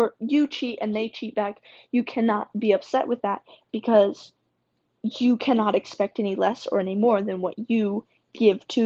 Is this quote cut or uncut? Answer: uncut